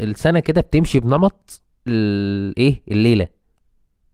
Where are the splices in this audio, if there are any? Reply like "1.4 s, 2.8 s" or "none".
1.9 s